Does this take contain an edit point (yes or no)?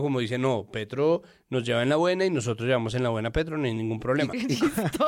no